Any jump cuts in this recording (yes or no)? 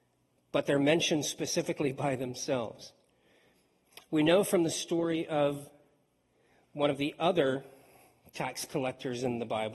no